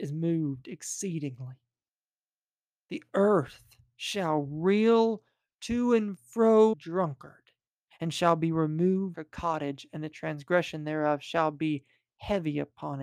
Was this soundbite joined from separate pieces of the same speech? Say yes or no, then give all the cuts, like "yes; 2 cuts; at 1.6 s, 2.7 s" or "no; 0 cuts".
yes; 2 cuts; at 6.7 s, 9.1 s